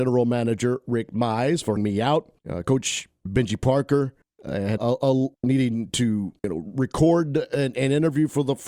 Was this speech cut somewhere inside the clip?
yes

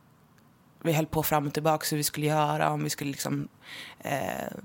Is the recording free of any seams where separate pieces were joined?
yes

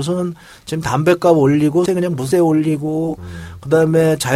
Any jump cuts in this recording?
yes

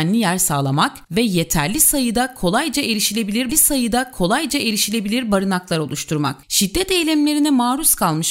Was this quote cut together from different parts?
yes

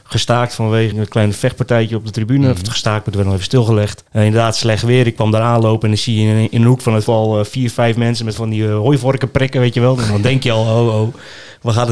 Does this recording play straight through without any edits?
no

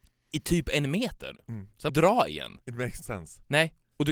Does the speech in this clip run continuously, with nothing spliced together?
no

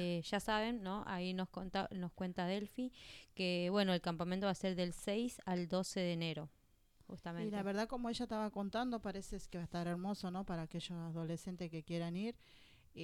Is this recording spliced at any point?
no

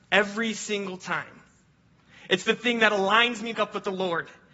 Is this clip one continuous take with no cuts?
no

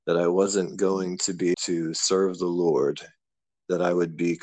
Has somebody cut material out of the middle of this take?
yes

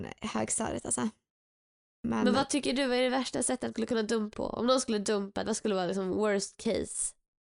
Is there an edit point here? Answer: yes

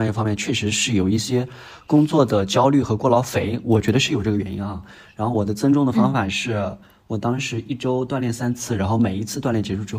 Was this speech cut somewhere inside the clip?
no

